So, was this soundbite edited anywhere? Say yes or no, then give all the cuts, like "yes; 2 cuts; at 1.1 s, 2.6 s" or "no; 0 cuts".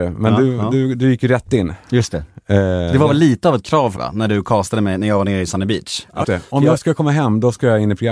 yes; 2 cuts; at 4.0 s, 6.2 s